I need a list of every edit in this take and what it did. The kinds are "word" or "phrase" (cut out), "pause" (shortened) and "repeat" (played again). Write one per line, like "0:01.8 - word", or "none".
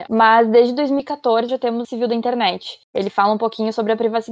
0:01.5 - word
0:01.8 - phrase
0:02.8 - pause

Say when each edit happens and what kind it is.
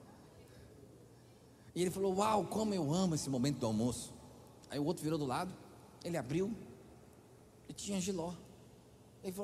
none

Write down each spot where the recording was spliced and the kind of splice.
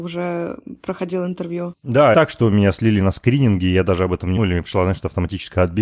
0:02.1 - phrase
0:04.4 - phrase

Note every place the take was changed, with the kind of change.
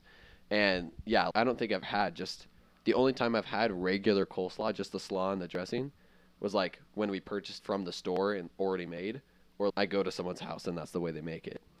0:01.3 - word
0:01.8 - word
0:07.6 - word
0:09.7 - word

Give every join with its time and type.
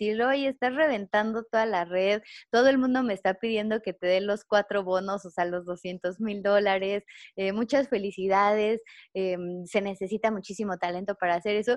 none

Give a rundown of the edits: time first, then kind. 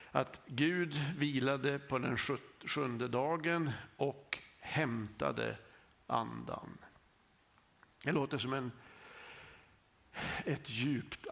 none

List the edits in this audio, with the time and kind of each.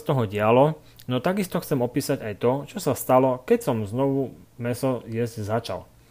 none

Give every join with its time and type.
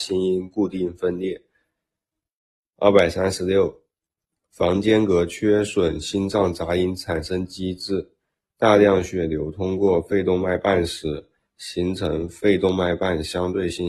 none

